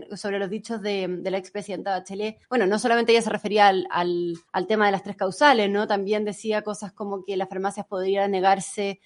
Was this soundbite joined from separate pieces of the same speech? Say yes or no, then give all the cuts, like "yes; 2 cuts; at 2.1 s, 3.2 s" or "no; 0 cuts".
yes; 2 cuts; at 2.4 s, 4.5 s